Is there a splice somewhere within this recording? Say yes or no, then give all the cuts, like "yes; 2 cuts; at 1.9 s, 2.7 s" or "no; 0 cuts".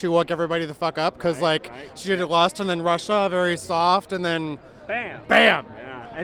no; 0 cuts